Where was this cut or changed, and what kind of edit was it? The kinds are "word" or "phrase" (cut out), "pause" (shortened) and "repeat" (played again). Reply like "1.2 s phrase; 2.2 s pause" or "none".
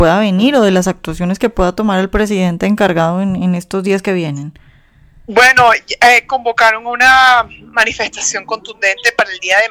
none